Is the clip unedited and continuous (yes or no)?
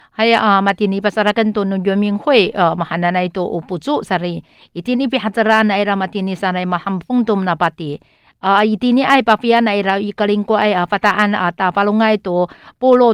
yes